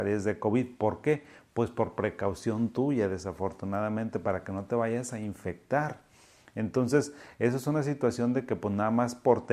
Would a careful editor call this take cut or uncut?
uncut